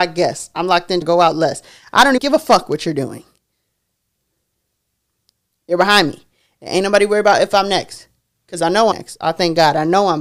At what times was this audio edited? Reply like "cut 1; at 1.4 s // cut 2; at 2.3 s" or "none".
cut 1; at 1.0 s // cut 2; at 2.2 s // cut 3; at 8.9 s